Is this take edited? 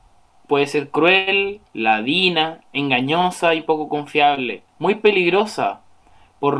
yes; 2 cuts; at 1.7 s, 4.7 s

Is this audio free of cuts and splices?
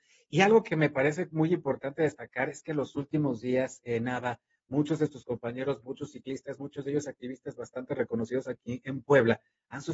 yes; 0 cuts

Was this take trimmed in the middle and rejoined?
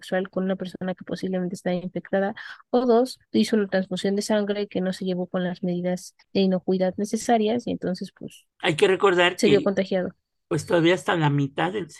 yes; 3 cuts; at 3.3 s, 6.2 s, 8.5 s

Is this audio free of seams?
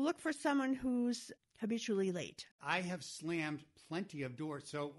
no; 1 cut; at 2.5 s

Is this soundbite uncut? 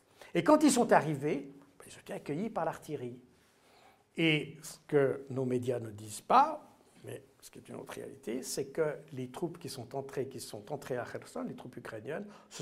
yes; 0 cuts

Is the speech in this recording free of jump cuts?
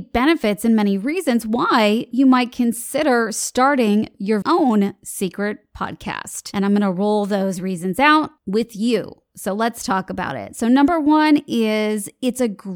no; 2 cuts; at 4.4 s, 8.4 s

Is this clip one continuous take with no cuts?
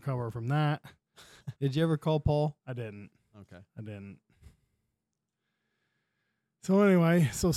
no; 3 cuts; at 1.6 s, 2.6 s, 3.7 s

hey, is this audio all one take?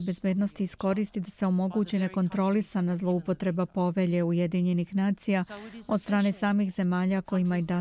yes; 0 cuts

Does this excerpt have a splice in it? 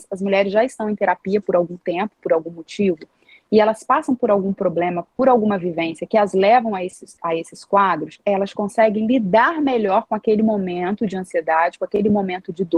no; 0 cuts

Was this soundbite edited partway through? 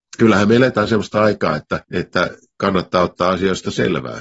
yes; 1 cut; at 1.8 s

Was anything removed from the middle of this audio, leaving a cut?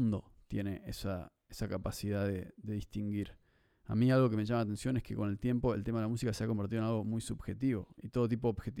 no; 0 cuts

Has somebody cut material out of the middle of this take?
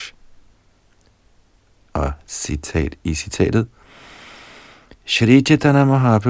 no; 0 cuts

